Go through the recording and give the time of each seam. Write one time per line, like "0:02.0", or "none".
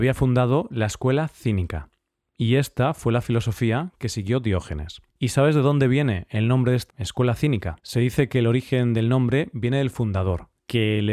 0:05.1
0:06.9
0:07.8

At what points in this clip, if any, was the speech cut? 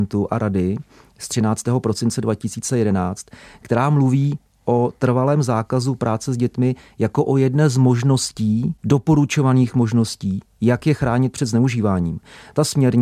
none

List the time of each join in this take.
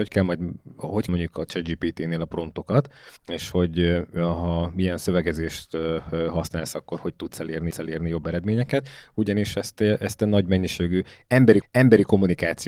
0:01.1
0:03.2
0:07.7
0:11.6

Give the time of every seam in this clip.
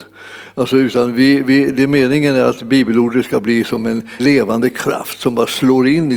0:04.2

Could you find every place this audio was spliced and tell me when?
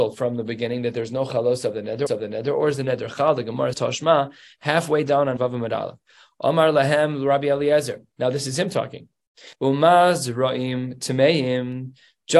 0:02.1
0:03.7
0:05.4
0:09.5

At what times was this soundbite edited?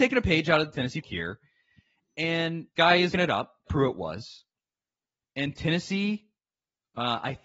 0:01.0
0:02.8
0:03.1
0:03.7

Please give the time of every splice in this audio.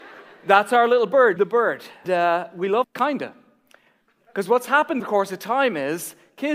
0:01.4
0:02.0
0:02.8
0:05.0

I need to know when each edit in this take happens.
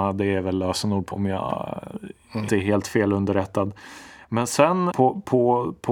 0:01.1
0:02.5
0:04.9

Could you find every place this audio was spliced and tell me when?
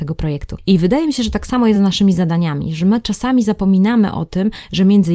none

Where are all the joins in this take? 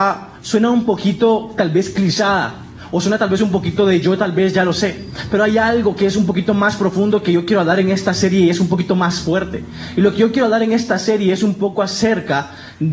none

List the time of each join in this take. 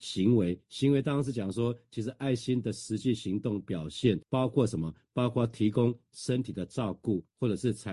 0:04.2

